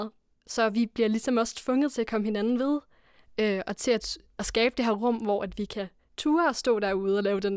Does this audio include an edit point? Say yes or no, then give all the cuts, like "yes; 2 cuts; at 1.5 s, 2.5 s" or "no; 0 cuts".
no; 0 cuts